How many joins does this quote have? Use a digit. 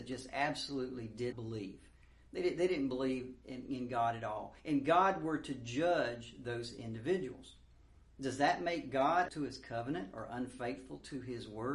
3